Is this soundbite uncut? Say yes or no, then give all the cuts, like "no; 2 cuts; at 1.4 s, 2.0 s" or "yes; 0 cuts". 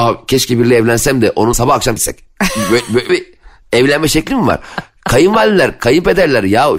no; 3 cuts; at 1.5 s, 2.0 s, 3.1 s